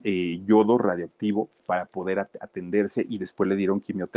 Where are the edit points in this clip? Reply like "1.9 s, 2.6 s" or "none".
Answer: 1.6 s